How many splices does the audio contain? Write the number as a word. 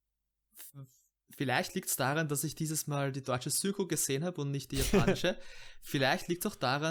zero